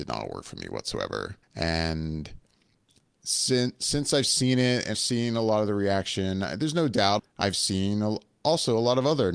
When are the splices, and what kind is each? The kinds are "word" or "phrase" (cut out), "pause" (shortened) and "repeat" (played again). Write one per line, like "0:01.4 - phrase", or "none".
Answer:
0:01.4 - pause
0:04.9 - word
0:07.2 - word